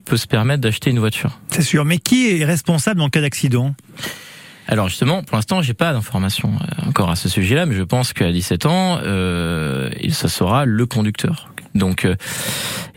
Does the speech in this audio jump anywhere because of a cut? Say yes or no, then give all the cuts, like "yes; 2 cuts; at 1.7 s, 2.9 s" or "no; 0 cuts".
no; 0 cuts